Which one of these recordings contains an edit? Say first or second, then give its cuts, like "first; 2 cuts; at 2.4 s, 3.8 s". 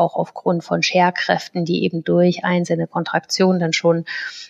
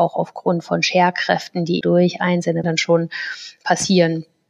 second; 2 cuts; at 1.8 s, 2.6 s